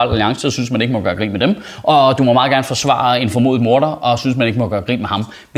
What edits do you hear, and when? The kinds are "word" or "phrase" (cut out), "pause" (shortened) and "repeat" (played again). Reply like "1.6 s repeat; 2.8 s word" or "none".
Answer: none